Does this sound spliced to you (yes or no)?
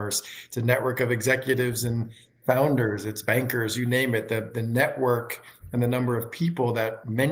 no